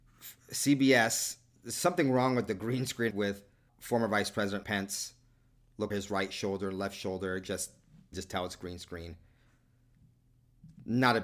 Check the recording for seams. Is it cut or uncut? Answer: cut